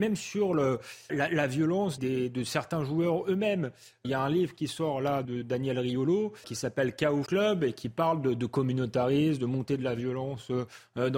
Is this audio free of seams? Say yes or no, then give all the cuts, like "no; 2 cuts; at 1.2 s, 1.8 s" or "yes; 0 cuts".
no; 6 cuts; at 1.1 s, 2.0 s, 4.0 s, 5.2 s, 6.4 s, 7.3 s